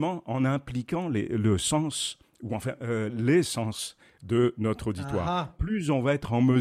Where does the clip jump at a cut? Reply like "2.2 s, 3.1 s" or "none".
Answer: none